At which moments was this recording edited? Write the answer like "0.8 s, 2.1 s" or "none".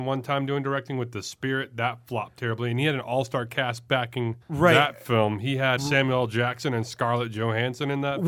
4.4 s, 5.8 s